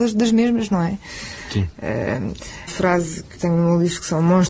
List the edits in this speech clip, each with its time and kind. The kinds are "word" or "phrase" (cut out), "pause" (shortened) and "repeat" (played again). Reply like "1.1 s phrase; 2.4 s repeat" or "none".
2.7 s word; 3.4 s word